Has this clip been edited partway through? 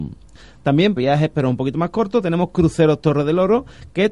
yes; 1 cut; at 1.0 s

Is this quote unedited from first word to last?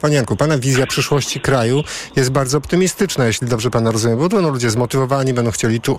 yes; 0 cuts

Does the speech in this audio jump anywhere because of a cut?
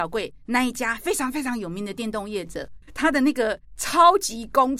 yes; 1 cut; at 3.6 s

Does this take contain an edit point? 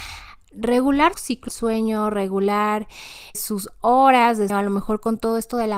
yes; 4 cuts; at 1.1 s, 1.5 s, 3.3 s, 4.5 s

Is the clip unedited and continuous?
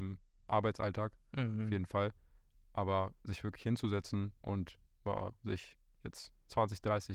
no; 2 cuts; at 3.2 s, 4.4 s

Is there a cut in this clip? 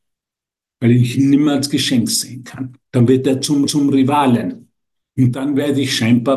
yes; 2 cuts; at 2.8 s, 3.7 s

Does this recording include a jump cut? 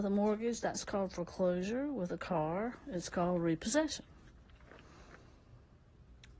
no; 0 cuts

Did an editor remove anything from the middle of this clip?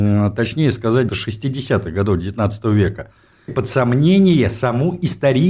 yes; 2 cuts; at 1.1 s, 3.5 s

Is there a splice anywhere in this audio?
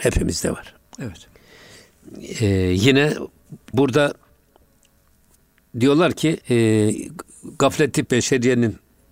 yes; 3 cuts; at 3.7 s, 6.4 s, 8.1 s

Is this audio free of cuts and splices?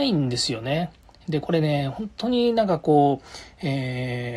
yes; 0 cuts

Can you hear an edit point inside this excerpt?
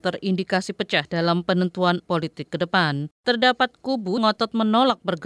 yes; 2 cuts; at 2.0 s, 4.2 s

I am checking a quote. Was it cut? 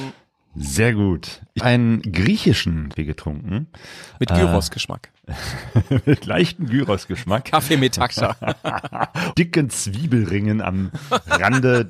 yes; 3 cuts; at 1.6 s, 3.0 s, 9.3 s

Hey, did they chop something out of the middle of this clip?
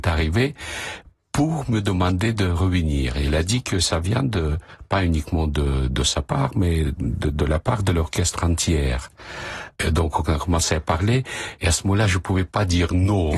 no; 0 cuts

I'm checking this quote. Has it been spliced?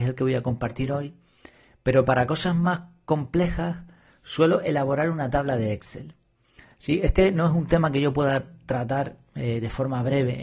no; 0 cuts

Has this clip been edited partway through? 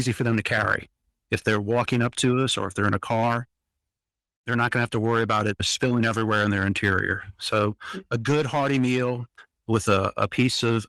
no; 0 cuts

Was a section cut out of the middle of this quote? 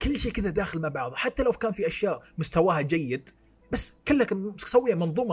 no; 0 cuts

